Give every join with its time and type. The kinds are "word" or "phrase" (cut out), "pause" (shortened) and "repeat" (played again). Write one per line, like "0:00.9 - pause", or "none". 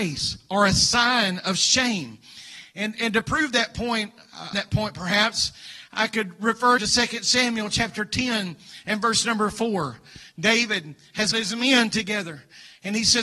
0:02.9 - word
0:04.5 - phrase
0:06.8 - word
0:11.3 - word

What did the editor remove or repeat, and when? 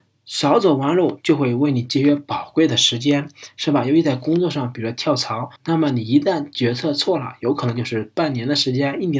0:05.6 - pause

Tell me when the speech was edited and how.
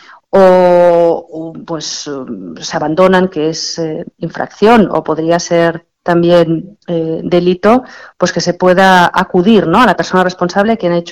none

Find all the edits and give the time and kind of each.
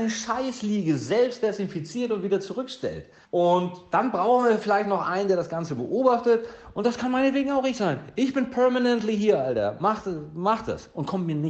0:03.2 - pause

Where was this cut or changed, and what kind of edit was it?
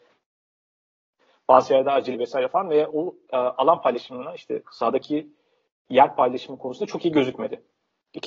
0:02.1 - word

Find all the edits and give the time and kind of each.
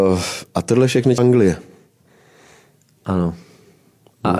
0:01.2 - word

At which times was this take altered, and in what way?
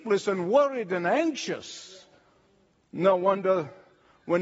none

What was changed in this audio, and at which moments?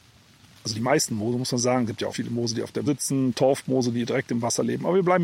0:02.1 - word
0:02.9 - word

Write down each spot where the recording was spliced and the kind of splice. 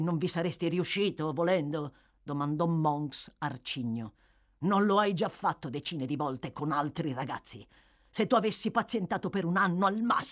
none

